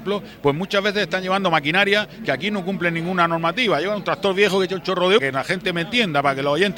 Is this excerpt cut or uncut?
cut